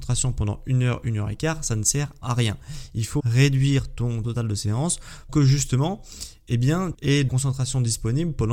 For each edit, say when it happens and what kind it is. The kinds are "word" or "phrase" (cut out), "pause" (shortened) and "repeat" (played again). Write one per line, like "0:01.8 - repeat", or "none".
0:02.2 - word
0:03.2 - word
0:04.2 - word
0:05.3 - word
0:06.9 - word
0:07.3 - word

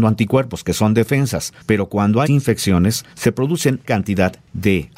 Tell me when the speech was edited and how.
0:01.6 - pause
0:02.3 - word
0:03.1 - pause
0:03.8 - word

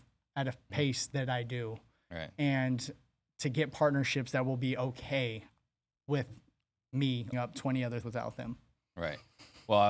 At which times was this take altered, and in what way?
0:07.3 - word
0:08.0 - word

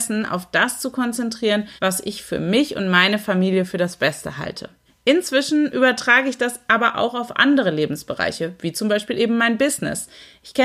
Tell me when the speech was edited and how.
0:01.8 - pause
0:04.9 - pause

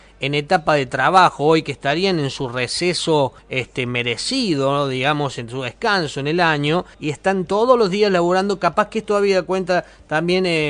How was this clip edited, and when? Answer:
0:03.4 - pause
0:06.9 - pause

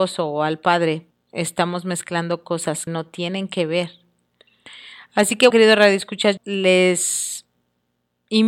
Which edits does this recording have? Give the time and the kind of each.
0:01.1 - word
0:02.9 - word
0:05.5 - word
0:06.4 - word

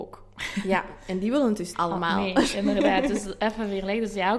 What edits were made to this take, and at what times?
0:01.7 - word

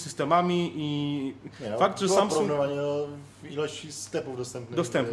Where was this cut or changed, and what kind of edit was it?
none

